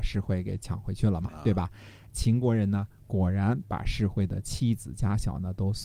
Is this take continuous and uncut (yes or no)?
no